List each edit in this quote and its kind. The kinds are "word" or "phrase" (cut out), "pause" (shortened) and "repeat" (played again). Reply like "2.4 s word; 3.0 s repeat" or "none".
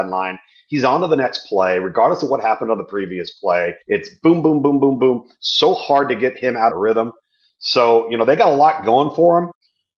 3.8 s pause; 6.7 s phrase